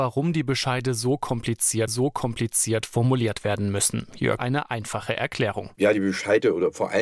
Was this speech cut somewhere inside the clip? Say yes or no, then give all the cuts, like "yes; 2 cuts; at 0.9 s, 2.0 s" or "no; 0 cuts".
yes; 2 cuts; at 1.9 s, 4.4 s